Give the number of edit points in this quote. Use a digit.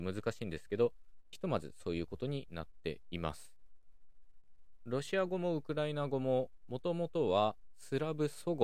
1